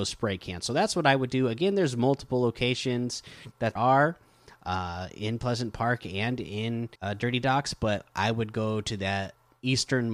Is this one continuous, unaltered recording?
no; 2 cuts; at 3.8 s, 7.0 s

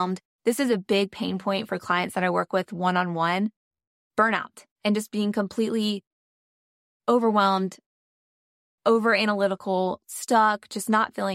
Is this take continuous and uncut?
yes; 0 cuts

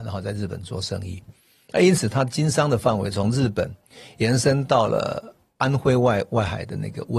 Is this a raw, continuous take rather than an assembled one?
yes; 0 cuts

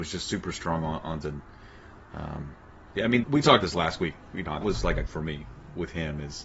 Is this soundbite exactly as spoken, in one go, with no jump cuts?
no; 5 cuts; at 1.2 s, 3.2 s, 3.6 s, 4.6 s, 5.1 s

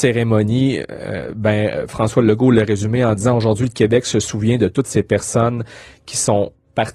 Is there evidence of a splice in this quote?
no; 0 cuts

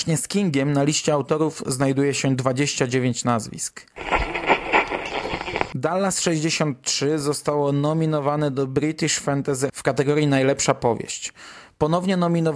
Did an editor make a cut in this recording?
yes; 1 cut; at 9.7 s

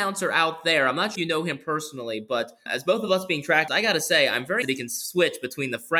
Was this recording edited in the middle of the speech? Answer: yes; 4 cuts; at 1.2 s, 2.7 s, 3.7 s, 4.6 s

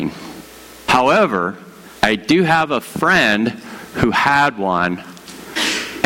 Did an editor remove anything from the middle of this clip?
yes; 1 cut; at 2.0 s

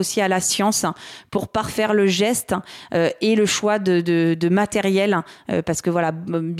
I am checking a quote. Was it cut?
no; 0 cuts

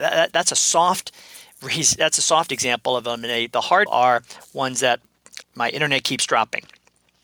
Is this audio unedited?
no; 2 cuts; at 3.9 s, 5.4 s

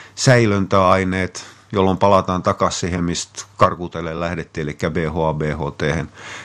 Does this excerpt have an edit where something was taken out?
no; 0 cuts

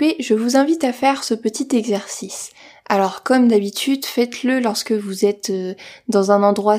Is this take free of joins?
yes; 0 cuts

